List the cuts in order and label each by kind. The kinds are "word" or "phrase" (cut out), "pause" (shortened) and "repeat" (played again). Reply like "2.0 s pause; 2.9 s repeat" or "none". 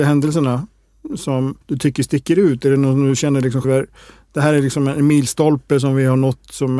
1.6 s pause; 3.6 s word